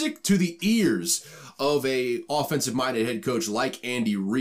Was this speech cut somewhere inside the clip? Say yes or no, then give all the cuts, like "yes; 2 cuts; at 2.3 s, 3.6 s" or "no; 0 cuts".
no; 0 cuts